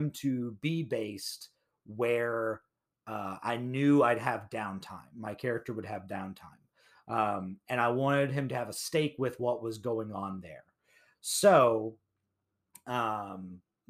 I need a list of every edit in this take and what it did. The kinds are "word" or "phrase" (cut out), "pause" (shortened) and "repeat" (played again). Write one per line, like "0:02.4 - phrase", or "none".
none

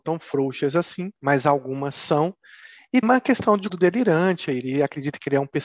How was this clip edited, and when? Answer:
0:01.2 - pause
0:03.0 - word
0:03.7 - word

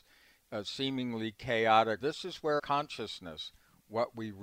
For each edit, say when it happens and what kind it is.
0:02.0 - phrase
0:02.6 - word

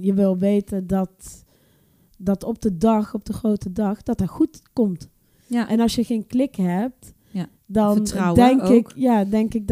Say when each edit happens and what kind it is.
none

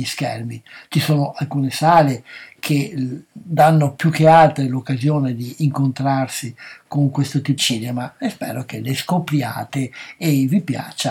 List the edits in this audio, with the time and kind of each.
0:07.6 - word

